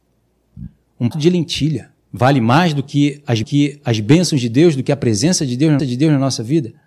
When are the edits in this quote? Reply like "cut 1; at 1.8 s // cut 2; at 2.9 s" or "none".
cut 1; at 1.1 s // cut 2; at 2.0 s // cut 3; at 3.4 s // cut 4; at 5.8 s